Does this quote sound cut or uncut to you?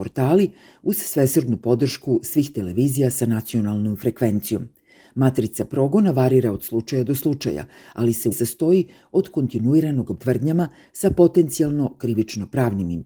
cut